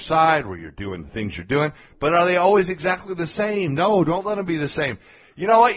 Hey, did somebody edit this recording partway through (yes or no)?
no